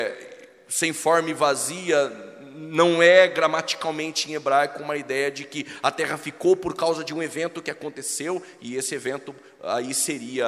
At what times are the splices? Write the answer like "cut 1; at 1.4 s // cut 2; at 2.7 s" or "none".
none